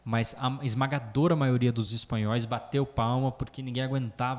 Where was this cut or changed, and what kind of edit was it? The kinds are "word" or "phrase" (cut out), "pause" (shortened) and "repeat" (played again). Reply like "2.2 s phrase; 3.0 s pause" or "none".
none